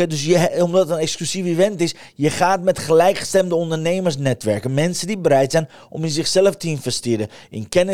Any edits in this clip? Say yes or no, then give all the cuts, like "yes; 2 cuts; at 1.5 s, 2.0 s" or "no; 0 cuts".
no; 0 cuts